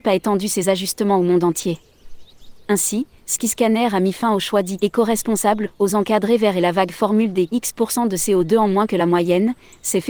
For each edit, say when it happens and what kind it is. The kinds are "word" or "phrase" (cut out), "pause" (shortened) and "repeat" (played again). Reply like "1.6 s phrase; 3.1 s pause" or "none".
none